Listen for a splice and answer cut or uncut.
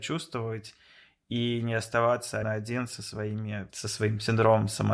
cut